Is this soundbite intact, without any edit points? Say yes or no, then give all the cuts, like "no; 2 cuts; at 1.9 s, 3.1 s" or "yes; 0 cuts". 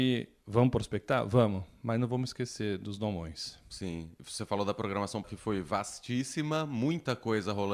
no; 1 cut; at 5.2 s